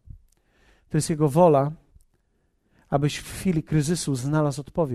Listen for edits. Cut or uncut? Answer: uncut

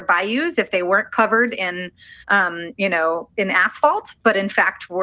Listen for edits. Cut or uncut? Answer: cut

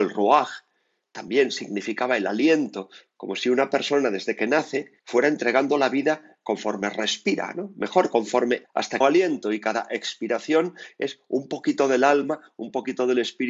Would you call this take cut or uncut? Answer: cut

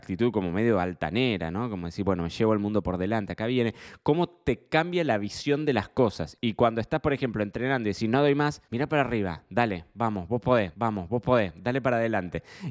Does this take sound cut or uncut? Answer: cut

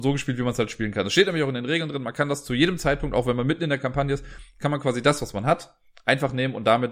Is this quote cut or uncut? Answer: uncut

